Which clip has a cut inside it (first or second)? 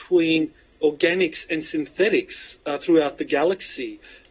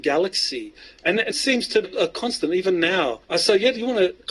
second